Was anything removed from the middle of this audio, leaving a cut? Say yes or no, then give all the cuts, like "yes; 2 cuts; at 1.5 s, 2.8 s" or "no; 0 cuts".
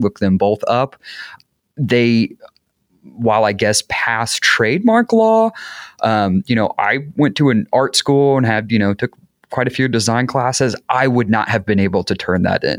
no; 0 cuts